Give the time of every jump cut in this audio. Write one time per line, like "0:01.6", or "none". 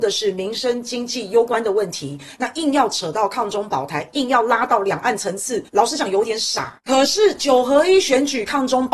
0:05.7